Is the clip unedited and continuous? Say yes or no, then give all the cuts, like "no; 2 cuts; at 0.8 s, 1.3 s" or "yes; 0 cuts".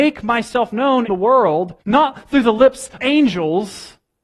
no; 3 cuts; at 1.1 s, 1.8 s, 3.0 s